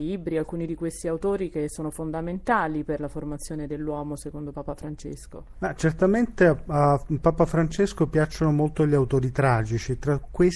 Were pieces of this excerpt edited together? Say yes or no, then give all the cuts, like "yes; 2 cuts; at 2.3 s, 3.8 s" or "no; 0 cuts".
no; 0 cuts